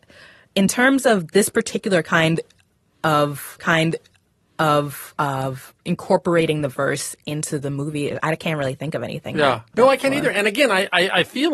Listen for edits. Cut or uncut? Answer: cut